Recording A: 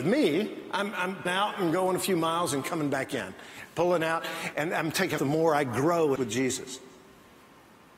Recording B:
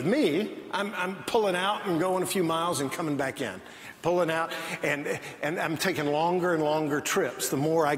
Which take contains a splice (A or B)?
A